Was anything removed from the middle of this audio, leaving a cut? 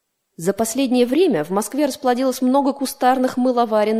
no; 0 cuts

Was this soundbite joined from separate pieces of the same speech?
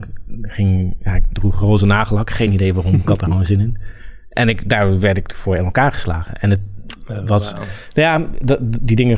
no; 0 cuts

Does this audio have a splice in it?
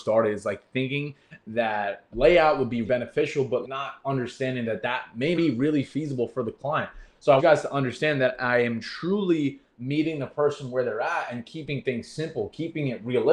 yes; 5 cuts; at 2.1 s, 2.8 s, 3.6 s, 5.4 s, 7.4 s

